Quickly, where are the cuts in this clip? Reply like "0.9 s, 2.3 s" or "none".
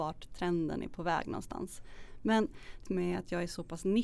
2.9 s